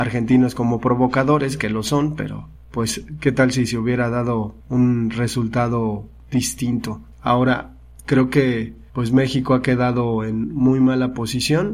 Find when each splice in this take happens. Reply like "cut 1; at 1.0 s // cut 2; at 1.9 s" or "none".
cut 1; at 2.6 s // cut 2; at 4.6 s // cut 3; at 7.1 s // cut 4; at 8.9 s